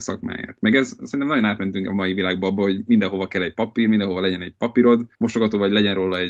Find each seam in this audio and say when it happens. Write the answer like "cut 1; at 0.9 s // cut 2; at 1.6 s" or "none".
cut 1; at 5.1 s

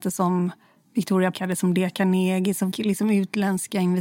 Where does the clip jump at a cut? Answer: cut 1; at 1.3 s // cut 2; at 2.7 s

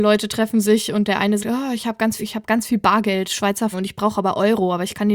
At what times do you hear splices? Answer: cut 1; at 1.4 s // cut 2; at 2.2 s // cut 3; at 3.7 s

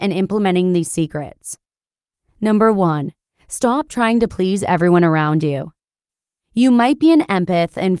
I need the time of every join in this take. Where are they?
none

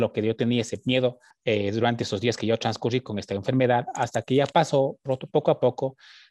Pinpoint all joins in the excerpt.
cut 1; at 1.3 s

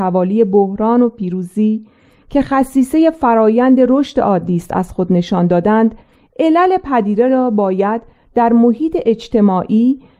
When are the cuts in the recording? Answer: none

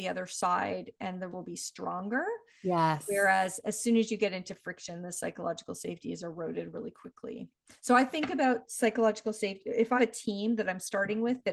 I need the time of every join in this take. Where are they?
cut 1; at 1.3 s // cut 2; at 6.7 s // cut 3; at 10.0 s

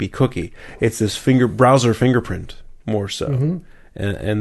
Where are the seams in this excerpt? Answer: cut 1; at 2.8 s

